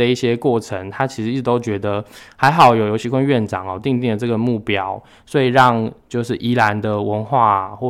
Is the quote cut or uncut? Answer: uncut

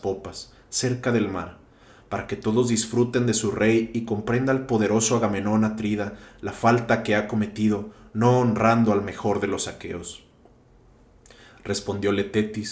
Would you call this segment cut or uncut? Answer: uncut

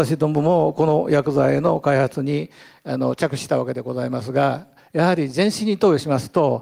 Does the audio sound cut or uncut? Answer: uncut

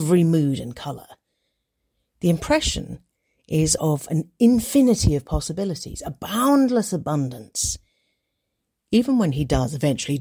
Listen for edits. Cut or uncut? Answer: uncut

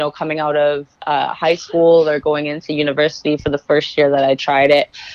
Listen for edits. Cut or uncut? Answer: cut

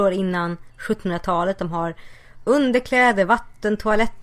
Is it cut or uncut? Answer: uncut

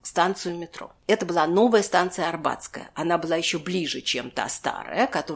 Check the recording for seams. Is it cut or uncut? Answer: cut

